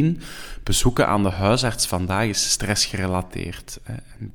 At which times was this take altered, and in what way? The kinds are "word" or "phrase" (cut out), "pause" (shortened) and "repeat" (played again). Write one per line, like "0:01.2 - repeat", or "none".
none